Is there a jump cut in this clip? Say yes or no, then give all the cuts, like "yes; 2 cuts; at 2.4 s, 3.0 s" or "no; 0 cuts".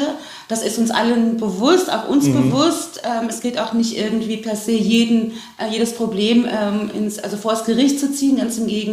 no; 0 cuts